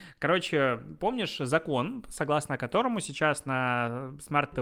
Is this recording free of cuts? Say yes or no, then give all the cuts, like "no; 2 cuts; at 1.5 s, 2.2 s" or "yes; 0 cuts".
yes; 0 cuts